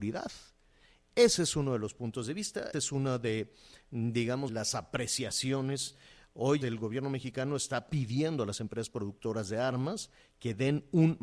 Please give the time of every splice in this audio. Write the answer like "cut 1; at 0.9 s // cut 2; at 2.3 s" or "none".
cut 1; at 2.7 s // cut 2; at 4.5 s // cut 3; at 6.6 s